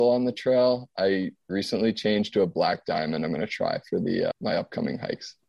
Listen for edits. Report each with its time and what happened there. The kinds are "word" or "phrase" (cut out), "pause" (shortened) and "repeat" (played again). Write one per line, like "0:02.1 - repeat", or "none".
0:04.3 - word